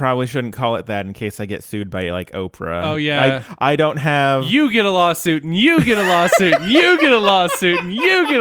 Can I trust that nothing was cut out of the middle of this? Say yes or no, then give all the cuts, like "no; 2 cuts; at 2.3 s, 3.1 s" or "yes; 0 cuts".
yes; 0 cuts